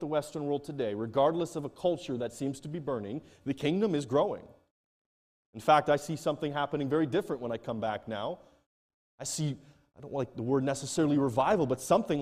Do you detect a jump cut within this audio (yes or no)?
no